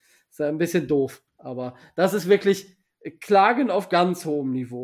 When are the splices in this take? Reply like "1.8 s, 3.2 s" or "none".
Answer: 1.3 s